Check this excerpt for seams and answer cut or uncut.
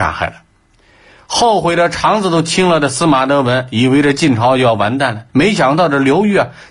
cut